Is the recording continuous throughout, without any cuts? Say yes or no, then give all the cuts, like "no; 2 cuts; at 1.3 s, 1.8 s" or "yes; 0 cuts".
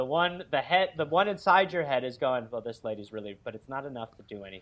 yes; 0 cuts